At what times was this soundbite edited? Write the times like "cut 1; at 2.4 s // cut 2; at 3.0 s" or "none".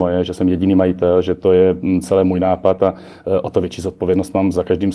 none